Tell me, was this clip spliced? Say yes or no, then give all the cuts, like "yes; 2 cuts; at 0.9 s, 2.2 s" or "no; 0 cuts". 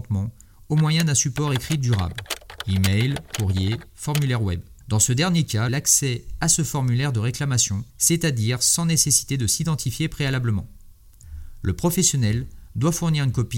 yes; 3 cuts; at 4.8 s, 5.7 s, 7.9 s